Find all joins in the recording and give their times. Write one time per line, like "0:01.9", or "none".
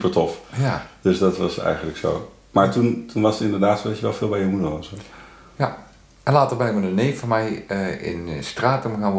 none